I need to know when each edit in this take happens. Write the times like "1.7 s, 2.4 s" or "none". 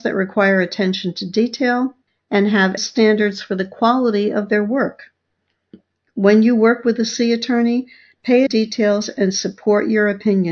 2.1 s, 2.8 s, 8.5 s